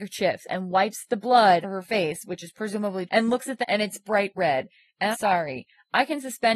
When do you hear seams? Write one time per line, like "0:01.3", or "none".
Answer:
0:01.6
0:03.1
0:03.6
0:05.1